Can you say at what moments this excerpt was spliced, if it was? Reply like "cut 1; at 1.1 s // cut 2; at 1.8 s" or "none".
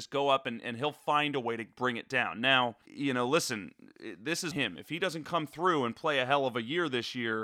cut 1; at 2.9 s // cut 2; at 4.5 s